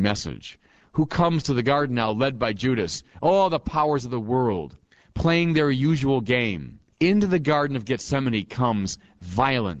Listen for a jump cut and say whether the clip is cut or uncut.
cut